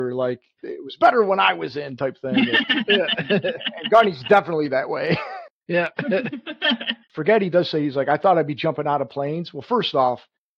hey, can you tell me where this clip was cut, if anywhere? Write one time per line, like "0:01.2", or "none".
0:07.0